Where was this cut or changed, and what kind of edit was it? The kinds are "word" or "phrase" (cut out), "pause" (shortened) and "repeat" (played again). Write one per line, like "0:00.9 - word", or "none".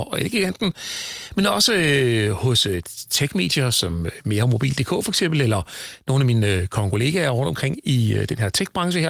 none